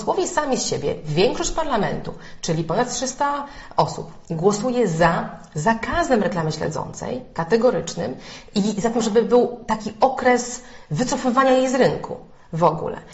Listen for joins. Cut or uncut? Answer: uncut